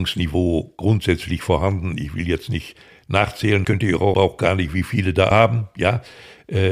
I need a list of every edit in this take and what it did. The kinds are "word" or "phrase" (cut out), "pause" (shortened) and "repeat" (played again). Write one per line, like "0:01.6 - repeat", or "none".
0:03.6 - word
0:04.1 - phrase
0:05.3 - word